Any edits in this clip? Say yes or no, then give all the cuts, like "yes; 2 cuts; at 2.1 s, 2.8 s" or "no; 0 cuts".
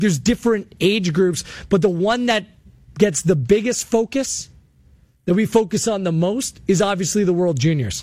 no; 0 cuts